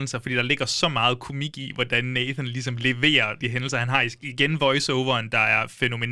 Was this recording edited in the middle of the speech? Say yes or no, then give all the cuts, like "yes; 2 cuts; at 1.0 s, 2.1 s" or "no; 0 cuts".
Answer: yes; 1 cut; at 3.4 s